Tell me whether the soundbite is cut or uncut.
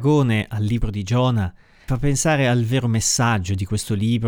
cut